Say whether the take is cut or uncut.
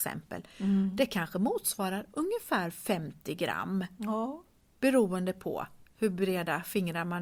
uncut